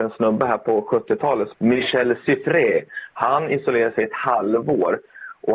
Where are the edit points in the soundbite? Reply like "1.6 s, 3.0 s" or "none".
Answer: 1.5 s